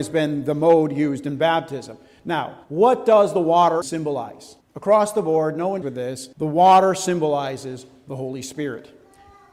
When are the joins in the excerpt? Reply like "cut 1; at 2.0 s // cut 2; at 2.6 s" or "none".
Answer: cut 1; at 2.6 s // cut 2; at 3.8 s // cut 3; at 4.6 s // cut 4; at 5.8 s // cut 5; at 6.3 s